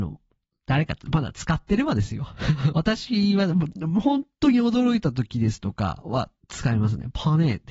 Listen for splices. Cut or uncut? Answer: cut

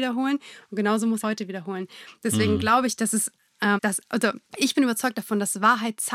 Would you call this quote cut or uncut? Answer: cut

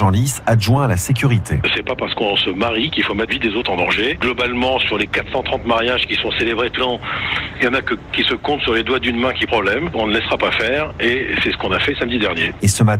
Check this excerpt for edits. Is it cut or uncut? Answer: cut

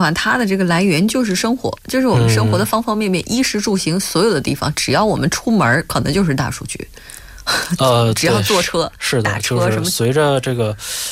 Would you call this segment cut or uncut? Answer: cut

